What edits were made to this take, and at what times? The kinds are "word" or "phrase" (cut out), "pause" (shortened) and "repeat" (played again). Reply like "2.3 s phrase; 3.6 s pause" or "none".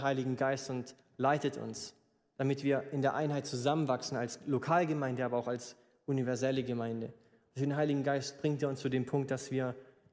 none